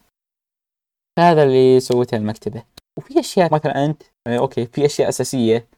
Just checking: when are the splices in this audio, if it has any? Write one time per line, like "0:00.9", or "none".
0:03.5